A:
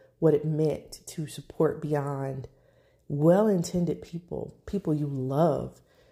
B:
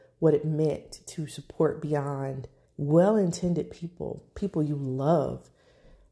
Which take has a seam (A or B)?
B